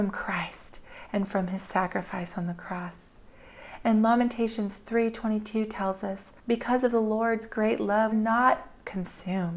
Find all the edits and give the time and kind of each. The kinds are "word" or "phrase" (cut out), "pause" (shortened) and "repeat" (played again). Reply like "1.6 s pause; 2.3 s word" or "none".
6.4 s pause; 8.1 s phrase